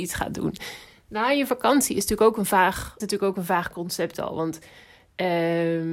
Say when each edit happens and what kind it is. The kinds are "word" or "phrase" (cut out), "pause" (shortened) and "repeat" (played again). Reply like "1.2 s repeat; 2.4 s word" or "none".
3.0 s word; 4.1 s word